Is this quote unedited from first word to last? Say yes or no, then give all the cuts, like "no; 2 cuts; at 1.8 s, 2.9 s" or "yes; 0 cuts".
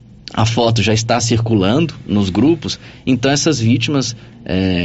yes; 0 cuts